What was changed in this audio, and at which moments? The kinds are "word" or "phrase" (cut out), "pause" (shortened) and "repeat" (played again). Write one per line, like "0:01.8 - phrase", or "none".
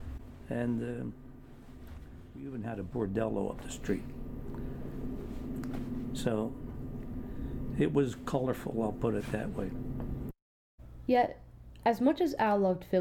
none